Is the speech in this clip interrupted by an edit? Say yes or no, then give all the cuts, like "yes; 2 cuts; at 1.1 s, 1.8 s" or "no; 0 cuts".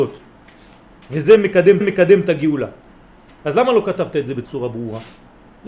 yes; 1 cut; at 1.8 s